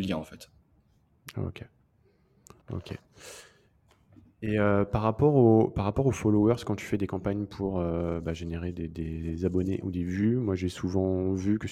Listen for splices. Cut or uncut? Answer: cut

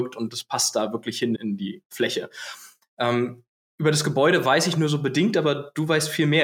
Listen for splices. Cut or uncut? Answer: cut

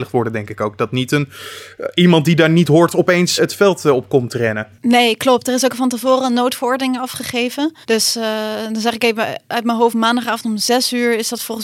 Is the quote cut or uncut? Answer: cut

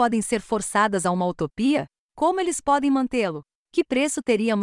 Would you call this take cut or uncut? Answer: uncut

